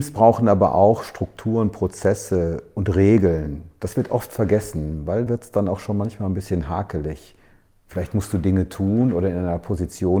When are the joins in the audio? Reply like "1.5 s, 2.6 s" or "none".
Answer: 5.3 s

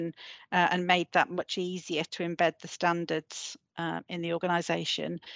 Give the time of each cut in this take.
none

